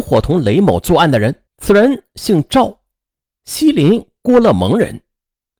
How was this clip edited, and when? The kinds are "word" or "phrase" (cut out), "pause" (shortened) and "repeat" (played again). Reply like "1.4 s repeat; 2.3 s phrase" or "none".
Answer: 1.5 s pause